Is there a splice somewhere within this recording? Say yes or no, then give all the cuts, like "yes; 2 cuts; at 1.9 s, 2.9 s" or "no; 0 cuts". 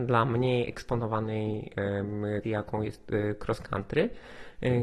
yes; 1 cut; at 2.4 s